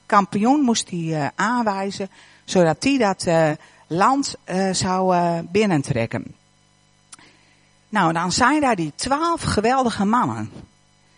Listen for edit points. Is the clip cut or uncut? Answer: uncut